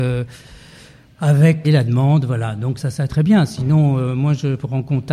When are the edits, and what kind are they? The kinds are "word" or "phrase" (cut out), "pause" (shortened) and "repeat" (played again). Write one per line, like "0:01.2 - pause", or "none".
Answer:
0:01.6 - phrase
0:02.8 - word
0:03.1 - word